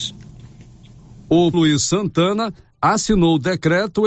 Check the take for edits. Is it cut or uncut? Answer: cut